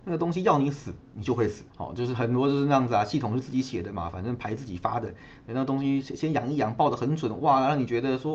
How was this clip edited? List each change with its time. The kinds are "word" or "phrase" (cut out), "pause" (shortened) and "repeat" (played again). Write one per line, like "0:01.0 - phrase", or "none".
0:01.0 - pause
0:01.7 - pause